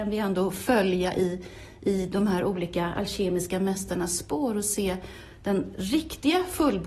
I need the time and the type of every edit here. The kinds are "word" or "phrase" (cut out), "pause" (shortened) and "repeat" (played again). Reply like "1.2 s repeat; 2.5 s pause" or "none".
none